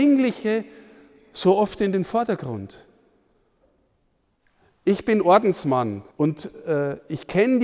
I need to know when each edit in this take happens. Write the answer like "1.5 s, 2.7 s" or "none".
6.1 s